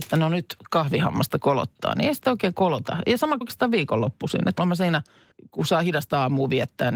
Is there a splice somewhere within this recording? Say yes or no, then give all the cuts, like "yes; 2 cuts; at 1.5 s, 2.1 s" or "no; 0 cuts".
yes; 3 cuts; at 3.4 s, 4.6 s, 5.3 s